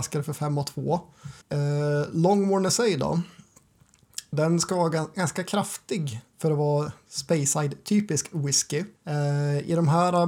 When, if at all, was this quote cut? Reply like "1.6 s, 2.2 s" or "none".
1.4 s, 6.3 s, 9.0 s